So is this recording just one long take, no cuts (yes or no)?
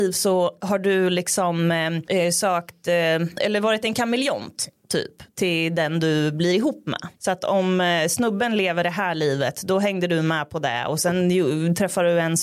yes